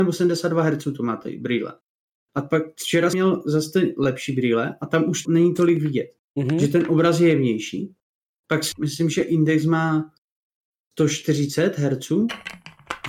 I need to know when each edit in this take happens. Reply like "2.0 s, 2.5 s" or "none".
3.1 s, 5.2 s, 8.7 s